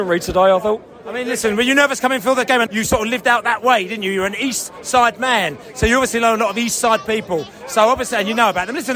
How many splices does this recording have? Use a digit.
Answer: 1